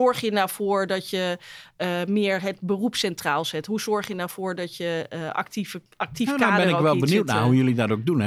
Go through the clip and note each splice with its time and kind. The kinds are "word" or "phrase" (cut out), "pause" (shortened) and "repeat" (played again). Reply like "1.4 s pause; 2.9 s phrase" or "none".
none